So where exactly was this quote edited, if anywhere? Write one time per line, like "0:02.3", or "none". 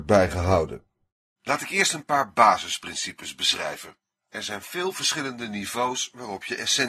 none